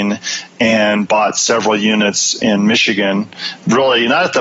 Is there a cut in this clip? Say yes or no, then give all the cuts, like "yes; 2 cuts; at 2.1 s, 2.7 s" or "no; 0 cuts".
no; 0 cuts